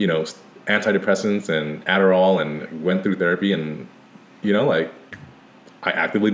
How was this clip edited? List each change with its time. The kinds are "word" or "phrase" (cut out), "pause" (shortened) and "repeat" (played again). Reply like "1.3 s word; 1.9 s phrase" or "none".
none